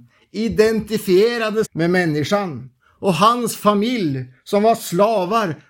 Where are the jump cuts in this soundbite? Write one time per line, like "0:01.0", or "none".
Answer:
0:01.6